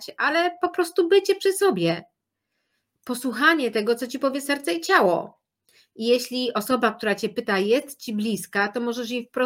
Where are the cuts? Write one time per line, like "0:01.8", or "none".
none